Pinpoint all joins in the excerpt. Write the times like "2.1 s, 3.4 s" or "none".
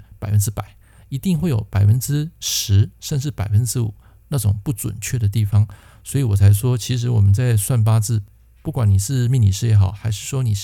none